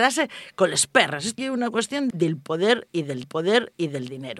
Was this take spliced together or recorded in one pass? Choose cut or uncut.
cut